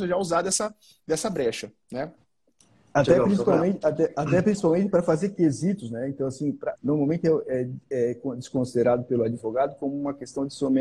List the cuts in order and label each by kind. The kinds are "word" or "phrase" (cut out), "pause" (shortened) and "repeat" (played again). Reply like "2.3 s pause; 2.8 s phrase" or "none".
6.8 s phrase